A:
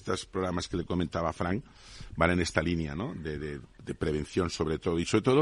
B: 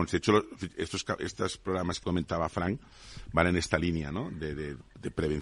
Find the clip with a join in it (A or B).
B